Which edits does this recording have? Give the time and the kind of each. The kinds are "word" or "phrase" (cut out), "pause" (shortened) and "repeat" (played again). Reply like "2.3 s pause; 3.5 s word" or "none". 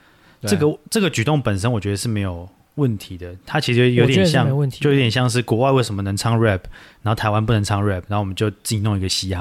none